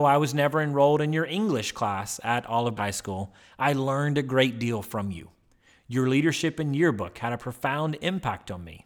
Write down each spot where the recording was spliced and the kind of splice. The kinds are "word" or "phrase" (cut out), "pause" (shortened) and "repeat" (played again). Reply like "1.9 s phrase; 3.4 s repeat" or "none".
2.8 s word